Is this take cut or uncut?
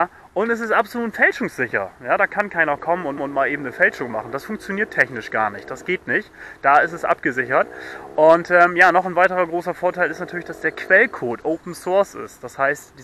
cut